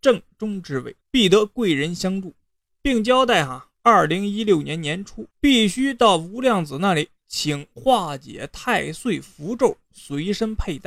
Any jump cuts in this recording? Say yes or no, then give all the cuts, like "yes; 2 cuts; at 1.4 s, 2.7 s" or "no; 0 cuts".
yes; 4 cuts; at 1.0 s, 2.7 s, 3.8 s, 5.3 s